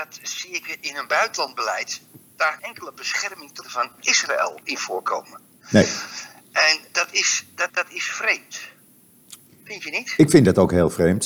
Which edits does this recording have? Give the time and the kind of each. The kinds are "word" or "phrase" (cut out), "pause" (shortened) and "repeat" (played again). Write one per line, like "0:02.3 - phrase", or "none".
0:02.6 - word
0:03.6 - word
0:04.0 - word
0:07.7 - word